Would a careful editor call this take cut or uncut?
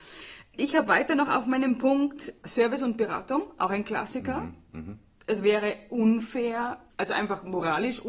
uncut